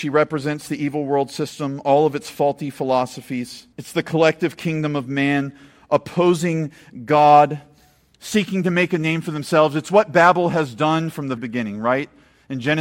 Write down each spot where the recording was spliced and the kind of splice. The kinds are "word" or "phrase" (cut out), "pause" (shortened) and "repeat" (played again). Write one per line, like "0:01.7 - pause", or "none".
0:03.7 - pause
0:11.4 - word